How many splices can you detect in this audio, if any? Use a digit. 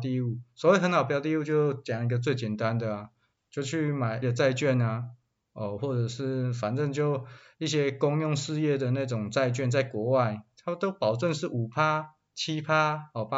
2